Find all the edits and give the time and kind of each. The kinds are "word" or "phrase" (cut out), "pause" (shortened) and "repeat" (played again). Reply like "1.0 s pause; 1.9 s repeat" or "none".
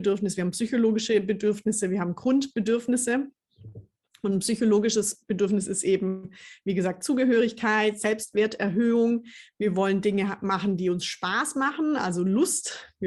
none